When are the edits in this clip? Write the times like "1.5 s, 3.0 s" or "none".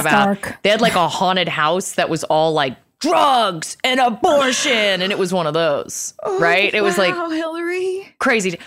none